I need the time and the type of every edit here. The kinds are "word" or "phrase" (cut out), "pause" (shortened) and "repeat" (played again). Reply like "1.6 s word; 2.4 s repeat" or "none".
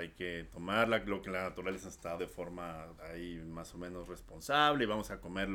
2.2 s word; 3.0 s word